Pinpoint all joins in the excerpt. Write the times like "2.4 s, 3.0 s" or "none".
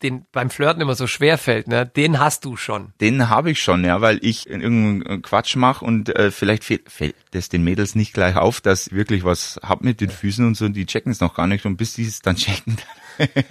4.4 s, 8.9 s